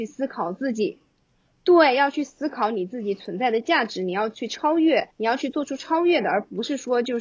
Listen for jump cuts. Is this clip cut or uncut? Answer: cut